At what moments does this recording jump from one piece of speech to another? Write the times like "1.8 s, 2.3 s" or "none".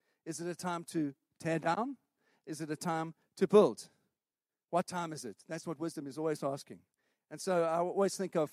none